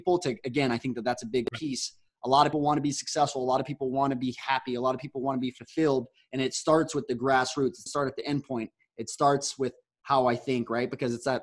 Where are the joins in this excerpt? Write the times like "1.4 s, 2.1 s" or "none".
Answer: 2.5 s, 7.9 s